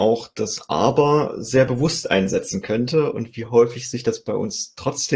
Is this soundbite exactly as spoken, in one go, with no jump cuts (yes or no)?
yes